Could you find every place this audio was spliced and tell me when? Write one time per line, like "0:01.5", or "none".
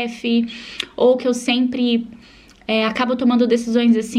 none